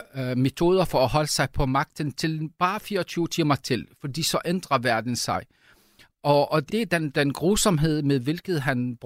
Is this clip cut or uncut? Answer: cut